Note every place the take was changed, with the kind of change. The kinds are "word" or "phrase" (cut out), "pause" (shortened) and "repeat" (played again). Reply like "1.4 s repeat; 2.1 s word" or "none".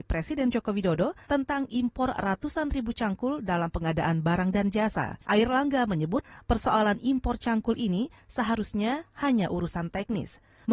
1.2 s pause; 5.2 s pause